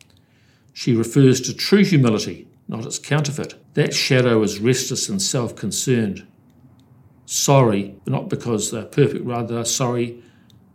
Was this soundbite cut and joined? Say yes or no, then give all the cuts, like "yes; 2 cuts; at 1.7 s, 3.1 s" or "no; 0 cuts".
yes; 2 cuts; at 3.6 s, 8.0 s